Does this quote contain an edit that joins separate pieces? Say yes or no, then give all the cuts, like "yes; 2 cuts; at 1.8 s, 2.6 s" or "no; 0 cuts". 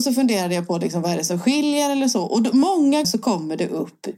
yes; 1 cut; at 3.0 s